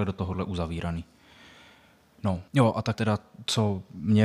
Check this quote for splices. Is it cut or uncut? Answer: cut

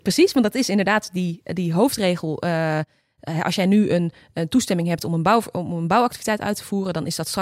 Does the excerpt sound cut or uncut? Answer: uncut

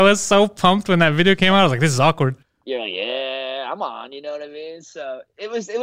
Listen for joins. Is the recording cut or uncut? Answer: cut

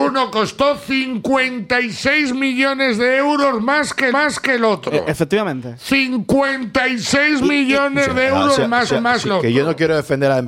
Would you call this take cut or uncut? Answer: cut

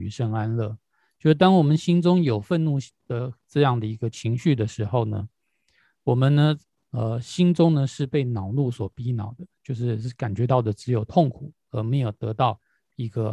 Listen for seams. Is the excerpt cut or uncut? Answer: uncut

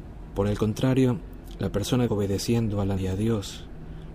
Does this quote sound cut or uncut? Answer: cut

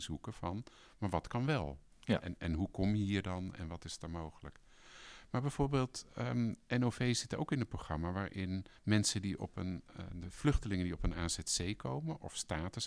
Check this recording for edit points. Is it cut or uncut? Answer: cut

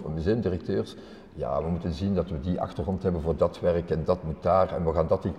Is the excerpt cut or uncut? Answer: uncut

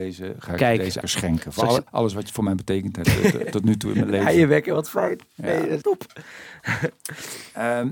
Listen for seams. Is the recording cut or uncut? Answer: cut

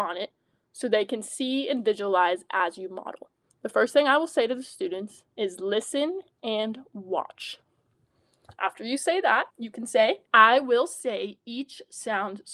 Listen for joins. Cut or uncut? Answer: cut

